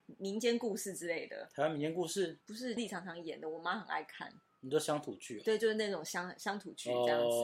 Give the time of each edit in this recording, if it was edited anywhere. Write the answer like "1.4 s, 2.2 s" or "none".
2.4 s, 2.8 s